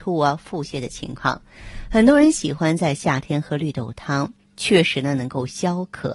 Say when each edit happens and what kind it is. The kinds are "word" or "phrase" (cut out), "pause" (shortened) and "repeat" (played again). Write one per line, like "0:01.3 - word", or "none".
none